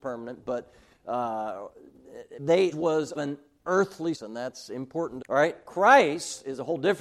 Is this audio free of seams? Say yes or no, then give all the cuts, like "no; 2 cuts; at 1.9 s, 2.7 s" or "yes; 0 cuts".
no; 5 cuts; at 2.4 s, 2.7 s, 3.1 s, 4.1 s, 5.2 s